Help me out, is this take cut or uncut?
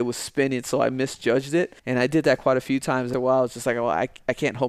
cut